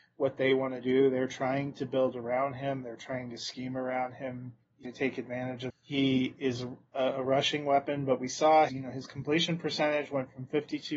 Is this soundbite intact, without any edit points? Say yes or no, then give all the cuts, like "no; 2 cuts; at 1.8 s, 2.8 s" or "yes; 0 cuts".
no; 3 cuts; at 4.8 s, 5.7 s, 8.7 s